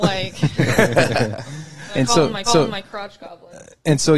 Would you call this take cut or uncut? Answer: cut